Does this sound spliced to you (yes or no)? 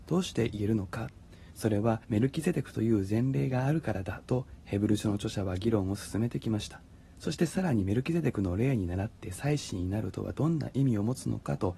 yes